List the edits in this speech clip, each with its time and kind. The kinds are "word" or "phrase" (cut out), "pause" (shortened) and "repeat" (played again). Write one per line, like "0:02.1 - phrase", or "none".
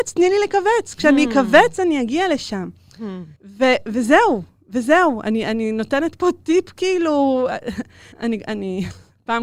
0:03.4 - pause
0:08.1 - pause